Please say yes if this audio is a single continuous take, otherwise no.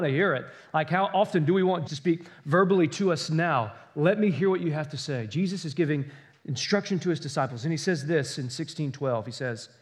no